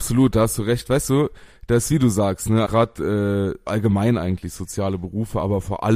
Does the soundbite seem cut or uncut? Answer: cut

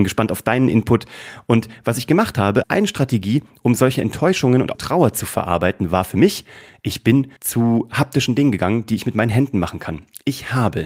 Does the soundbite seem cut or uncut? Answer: cut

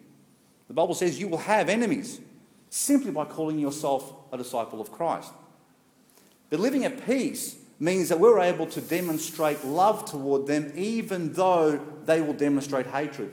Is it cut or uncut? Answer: uncut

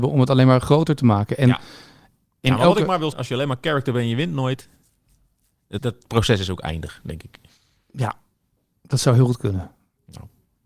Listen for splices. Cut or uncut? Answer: cut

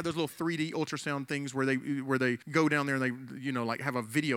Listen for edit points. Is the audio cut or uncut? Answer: cut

